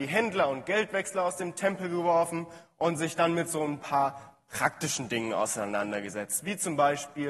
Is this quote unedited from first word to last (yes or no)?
yes